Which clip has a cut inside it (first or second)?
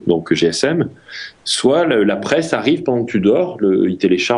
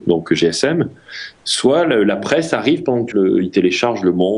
second